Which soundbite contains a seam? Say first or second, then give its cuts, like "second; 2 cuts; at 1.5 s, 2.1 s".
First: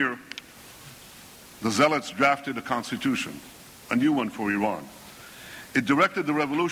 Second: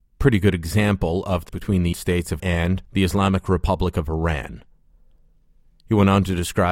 second; 4 cuts; at 1.5 s, 1.9 s, 2.4 s, 2.8 s